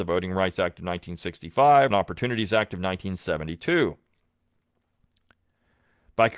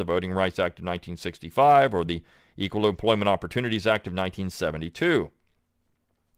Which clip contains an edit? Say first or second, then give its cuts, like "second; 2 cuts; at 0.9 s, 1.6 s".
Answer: first; 1 cut; at 1.9 s